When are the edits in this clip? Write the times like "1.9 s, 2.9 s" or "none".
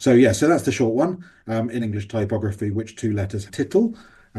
1.8 s, 3.5 s